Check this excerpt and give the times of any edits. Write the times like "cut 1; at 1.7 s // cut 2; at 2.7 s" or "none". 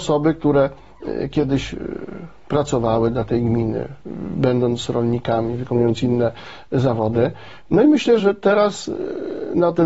cut 1; at 8.2 s